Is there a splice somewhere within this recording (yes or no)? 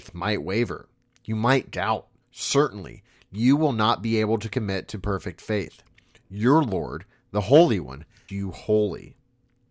yes